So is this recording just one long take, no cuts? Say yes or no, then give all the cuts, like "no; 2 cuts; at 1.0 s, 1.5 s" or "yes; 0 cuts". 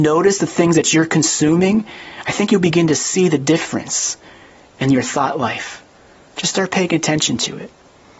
yes; 0 cuts